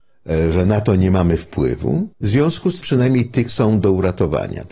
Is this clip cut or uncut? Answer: cut